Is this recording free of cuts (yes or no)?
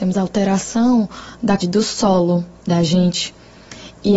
no